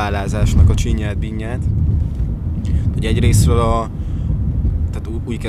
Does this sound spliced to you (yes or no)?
no